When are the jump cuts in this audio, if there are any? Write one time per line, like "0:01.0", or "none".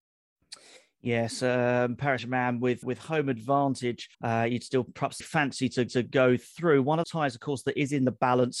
0:02.2
0:02.8
0:04.1
0:05.2
0:05.9
0:07.0